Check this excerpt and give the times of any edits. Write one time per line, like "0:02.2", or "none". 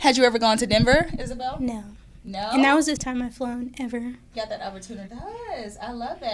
0:03.0
0:04.3
0:05.1